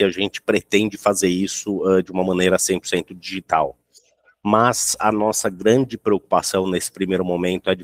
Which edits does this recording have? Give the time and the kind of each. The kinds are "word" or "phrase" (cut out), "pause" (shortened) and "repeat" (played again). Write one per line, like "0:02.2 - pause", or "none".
none